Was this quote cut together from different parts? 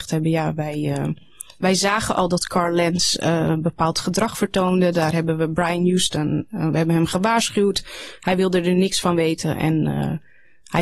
no; 0 cuts

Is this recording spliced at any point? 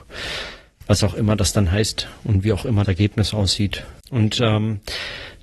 yes; 2 cuts; at 2.8 s, 4.0 s

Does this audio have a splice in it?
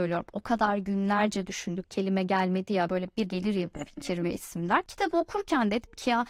yes; 3 cuts; at 1.8 s, 2.9 s, 3.2 s

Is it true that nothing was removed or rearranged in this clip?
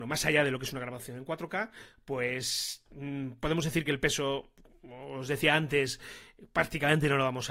yes; 0 cuts

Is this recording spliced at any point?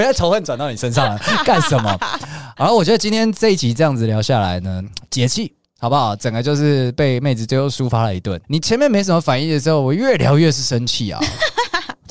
yes; 1 cut; at 8.4 s

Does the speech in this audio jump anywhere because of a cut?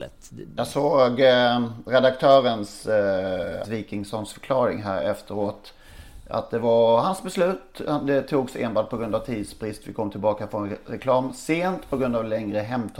yes; 1 cut; at 3.6 s

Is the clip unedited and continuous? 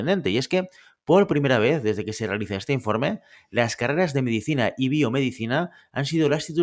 yes; 0 cuts

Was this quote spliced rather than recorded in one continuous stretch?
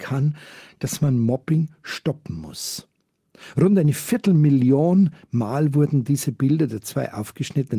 no; 0 cuts

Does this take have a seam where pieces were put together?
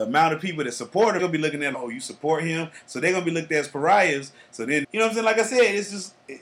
yes; 3 cuts; at 1.2 s, 1.7 s, 4.8 s

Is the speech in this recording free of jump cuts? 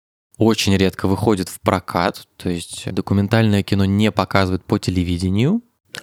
yes; 0 cuts

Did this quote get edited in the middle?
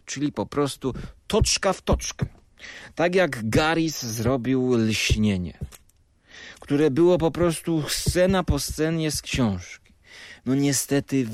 no; 0 cuts

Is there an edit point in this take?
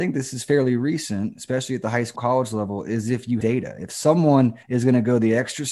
yes; 3 cuts; at 2.2 s, 3.4 s, 4.6 s

